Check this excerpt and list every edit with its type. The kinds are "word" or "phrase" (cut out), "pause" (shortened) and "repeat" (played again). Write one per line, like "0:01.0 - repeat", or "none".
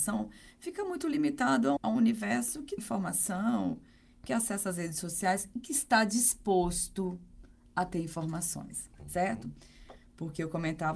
0:01.8 - word
0:02.8 - word